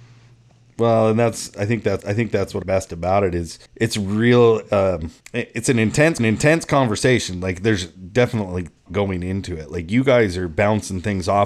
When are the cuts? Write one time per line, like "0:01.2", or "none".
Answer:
0:02.0
0:02.6
0:03.7
0:05.2
0:06.2
0:08.9